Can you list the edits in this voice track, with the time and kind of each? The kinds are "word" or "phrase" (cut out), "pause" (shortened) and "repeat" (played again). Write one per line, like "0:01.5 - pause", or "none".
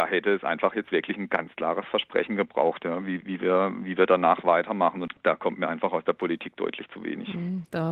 0:03.2 - word